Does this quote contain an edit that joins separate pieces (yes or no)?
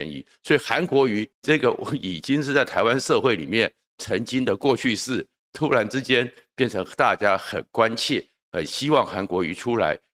yes